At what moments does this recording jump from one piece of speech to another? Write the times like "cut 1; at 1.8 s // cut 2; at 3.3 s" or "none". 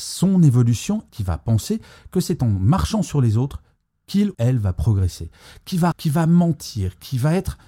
cut 1; at 1.1 s // cut 2; at 4.3 s // cut 3; at 5.9 s